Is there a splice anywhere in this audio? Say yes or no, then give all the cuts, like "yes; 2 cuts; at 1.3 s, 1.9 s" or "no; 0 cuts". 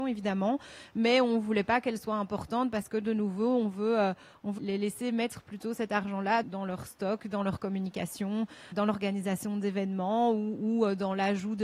yes; 3 cuts; at 4.6 s, 6.4 s, 8.7 s